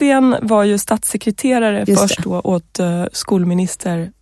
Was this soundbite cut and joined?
no; 0 cuts

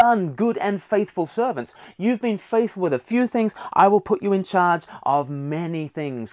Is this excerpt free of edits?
yes; 0 cuts

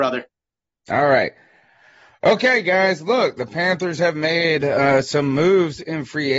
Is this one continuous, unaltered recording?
yes; 0 cuts

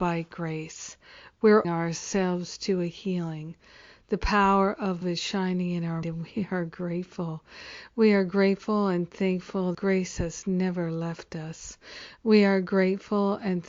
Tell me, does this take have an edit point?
yes; 4 cuts; at 1.6 s, 5.0 s, 6.0 s, 9.7 s

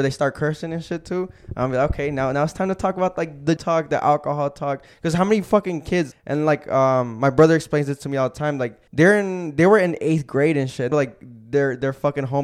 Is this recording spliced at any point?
yes; 4 cuts; at 3.6 s, 6.1 s, 8.9 s, 10.9 s

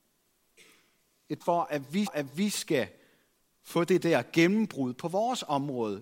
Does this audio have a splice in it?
yes; 2 cuts; at 1.4 s, 2.1 s

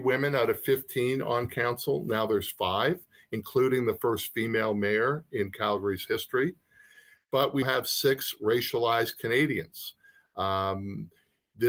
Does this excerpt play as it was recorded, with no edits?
no; 1 cut; at 7.6 s

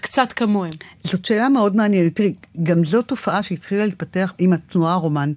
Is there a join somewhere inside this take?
no; 0 cuts

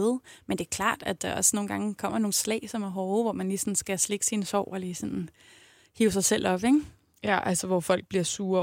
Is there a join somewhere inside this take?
no; 0 cuts

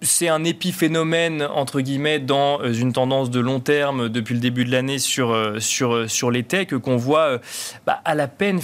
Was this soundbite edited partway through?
no; 0 cuts

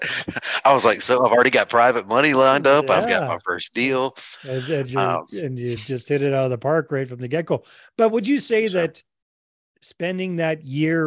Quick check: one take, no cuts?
yes; 0 cuts

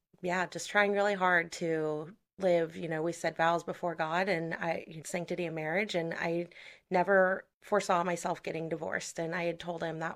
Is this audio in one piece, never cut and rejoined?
no; 2 cuts; at 5.0 s, 7.5 s

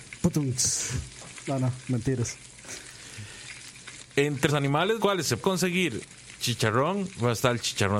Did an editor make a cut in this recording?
yes; 3 cuts; at 4.5 s, 5.0 s, 5.4 s

